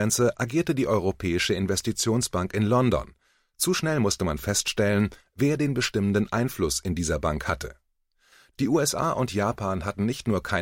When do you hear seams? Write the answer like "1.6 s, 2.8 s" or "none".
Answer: none